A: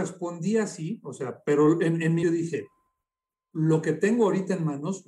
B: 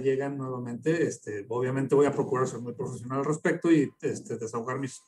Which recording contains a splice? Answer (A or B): A